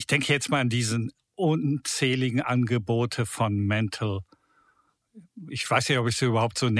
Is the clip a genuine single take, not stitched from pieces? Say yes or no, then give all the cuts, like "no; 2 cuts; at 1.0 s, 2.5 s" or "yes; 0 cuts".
yes; 0 cuts